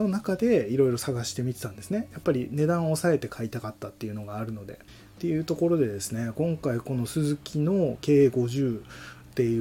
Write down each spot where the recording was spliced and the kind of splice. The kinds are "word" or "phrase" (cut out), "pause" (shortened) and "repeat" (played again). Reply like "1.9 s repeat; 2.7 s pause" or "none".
4.9 s pause

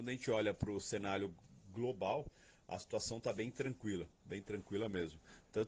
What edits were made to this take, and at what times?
none

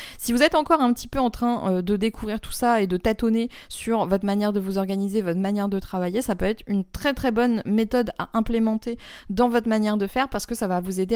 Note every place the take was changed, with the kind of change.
none

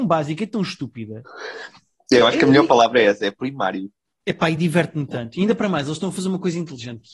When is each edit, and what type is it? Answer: none

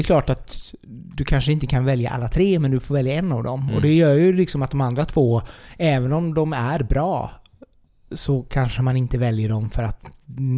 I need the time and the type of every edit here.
none

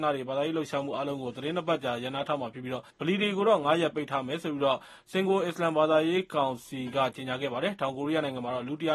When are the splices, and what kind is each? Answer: 2.9 s pause

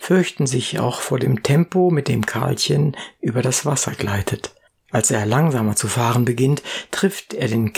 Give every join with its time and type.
4.7 s pause

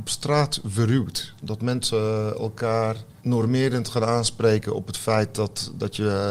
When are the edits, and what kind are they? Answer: 3.2 s pause

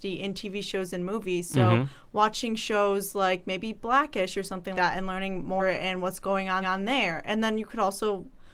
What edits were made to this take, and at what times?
4.7 s word; 5.6 s phrase; 6.6 s repeat

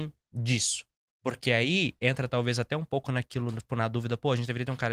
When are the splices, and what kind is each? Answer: none

